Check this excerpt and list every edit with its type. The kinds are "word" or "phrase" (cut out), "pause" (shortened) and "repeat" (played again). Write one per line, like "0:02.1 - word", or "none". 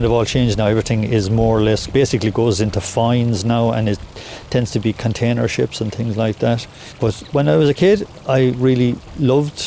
none